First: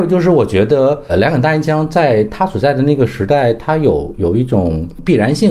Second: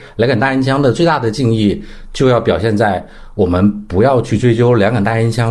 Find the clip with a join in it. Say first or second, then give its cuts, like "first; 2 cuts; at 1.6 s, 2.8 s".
first; 1 cut; at 1.1 s